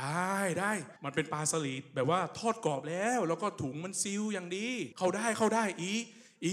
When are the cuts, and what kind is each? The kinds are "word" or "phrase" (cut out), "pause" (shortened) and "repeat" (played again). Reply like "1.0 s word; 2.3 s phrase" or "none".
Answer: 1.0 s pause; 4.9 s pause